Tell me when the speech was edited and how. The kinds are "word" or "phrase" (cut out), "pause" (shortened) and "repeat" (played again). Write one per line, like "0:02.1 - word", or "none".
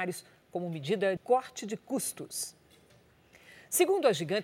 0:01.2 - word